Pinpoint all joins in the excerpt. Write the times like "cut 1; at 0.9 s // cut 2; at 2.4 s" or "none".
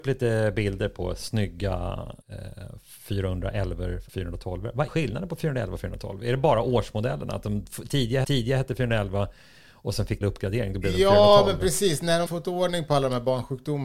cut 1; at 2.2 s // cut 2; at 4.1 s // cut 3; at 4.9 s // cut 4; at 8.2 s // cut 5; at 10.2 s // cut 6; at 12.3 s